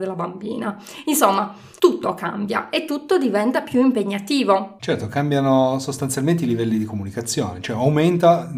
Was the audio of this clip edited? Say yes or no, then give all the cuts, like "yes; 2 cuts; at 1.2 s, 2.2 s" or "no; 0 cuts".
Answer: no; 0 cuts